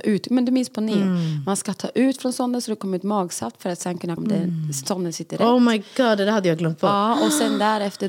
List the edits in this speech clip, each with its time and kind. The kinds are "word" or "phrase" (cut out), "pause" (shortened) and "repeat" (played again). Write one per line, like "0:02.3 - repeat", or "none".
0:04.2 - word